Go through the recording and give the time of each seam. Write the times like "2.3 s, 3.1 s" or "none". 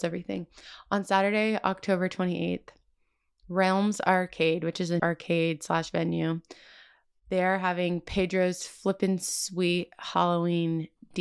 5.0 s